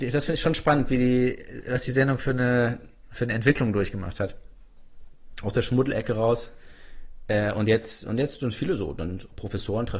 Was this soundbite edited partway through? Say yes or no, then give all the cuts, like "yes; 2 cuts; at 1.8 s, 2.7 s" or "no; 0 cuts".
no; 0 cuts